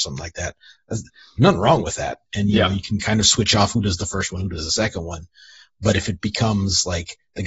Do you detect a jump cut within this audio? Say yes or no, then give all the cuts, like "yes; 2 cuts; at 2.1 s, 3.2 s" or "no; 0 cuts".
no; 0 cuts